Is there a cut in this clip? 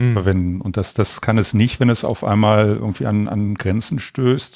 no; 0 cuts

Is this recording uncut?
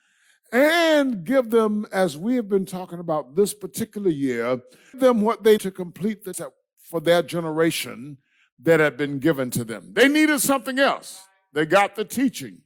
no; 3 cuts; at 4.9 s, 5.6 s, 6.3 s

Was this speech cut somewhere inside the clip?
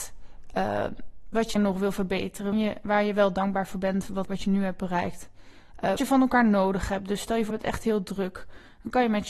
yes; 5 cuts; at 1.6 s, 2.5 s, 4.3 s, 6.0 s, 7.5 s

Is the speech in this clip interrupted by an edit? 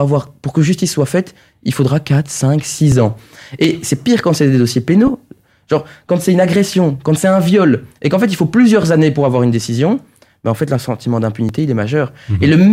no; 0 cuts

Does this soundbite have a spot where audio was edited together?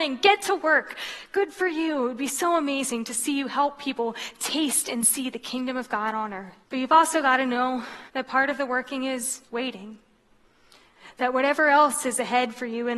yes; 3 cuts; at 6.6 s, 8.1 s, 9.4 s

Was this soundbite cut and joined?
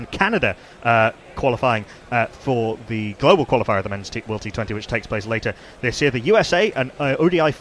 no; 0 cuts

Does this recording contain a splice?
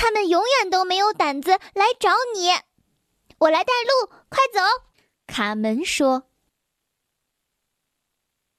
no; 0 cuts

